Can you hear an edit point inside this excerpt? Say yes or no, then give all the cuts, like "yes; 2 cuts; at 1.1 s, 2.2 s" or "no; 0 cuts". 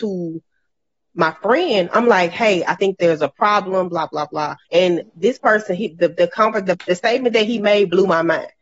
yes; 1 cut; at 4.6 s